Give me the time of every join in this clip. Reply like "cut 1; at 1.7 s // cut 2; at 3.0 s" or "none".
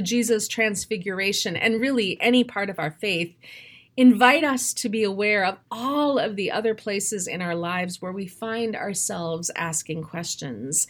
none

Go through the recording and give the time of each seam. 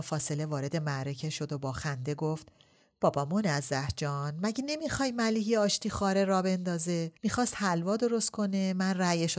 cut 1; at 7.2 s

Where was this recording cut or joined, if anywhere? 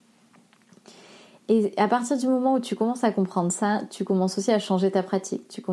none

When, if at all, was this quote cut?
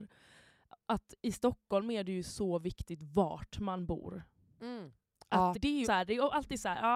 cut 1; at 5.5 s // cut 2; at 5.8 s

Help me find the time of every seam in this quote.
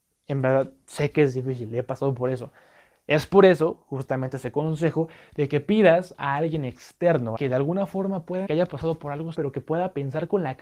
cut 1; at 7.4 s // cut 2; at 8.5 s // cut 3; at 9.3 s

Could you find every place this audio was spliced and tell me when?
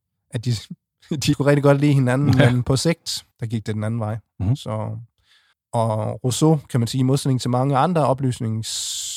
cut 1; at 1.3 s // cut 2; at 3.3 s // cut 3; at 5.5 s

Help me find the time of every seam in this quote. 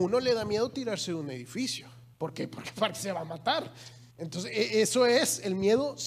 cut 1; at 2.1 s // cut 2; at 4.1 s

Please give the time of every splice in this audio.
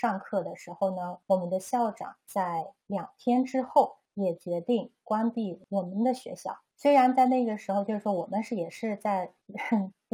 cut 1; at 1.2 s

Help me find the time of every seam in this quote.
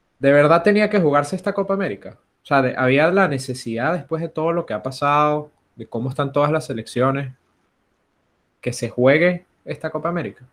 none

